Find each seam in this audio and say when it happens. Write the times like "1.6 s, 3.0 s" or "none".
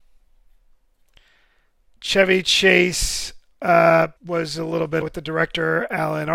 4.2 s, 5.0 s